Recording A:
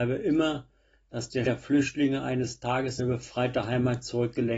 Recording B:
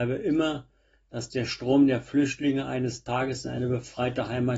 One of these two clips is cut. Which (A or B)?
A